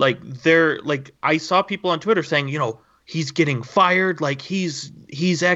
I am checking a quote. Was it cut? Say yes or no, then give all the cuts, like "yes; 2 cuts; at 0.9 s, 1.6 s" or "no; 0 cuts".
no; 0 cuts